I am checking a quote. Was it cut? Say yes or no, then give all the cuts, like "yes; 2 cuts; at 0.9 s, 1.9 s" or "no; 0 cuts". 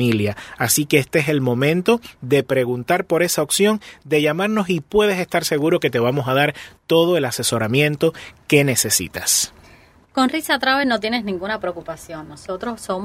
no; 0 cuts